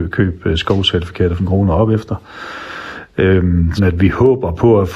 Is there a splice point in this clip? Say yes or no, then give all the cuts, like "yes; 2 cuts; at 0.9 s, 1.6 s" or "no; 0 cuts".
yes; 2 cuts; at 1.4 s, 3.8 s